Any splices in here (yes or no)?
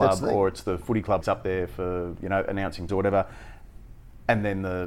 yes